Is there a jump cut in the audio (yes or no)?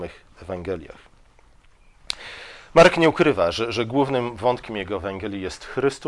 no